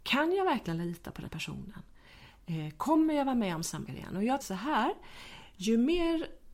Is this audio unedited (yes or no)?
no